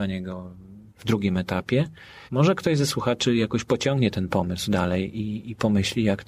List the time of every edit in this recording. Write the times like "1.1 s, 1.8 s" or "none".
2.3 s